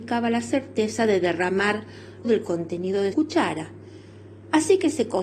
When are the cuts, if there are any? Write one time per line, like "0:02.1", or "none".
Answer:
0:02.2
0:03.1